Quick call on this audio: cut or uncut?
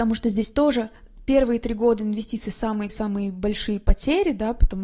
cut